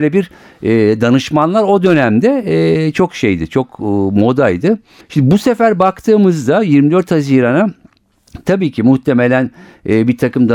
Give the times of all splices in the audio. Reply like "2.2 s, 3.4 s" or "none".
5.0 s